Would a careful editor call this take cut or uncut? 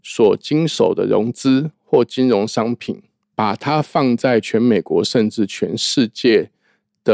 cut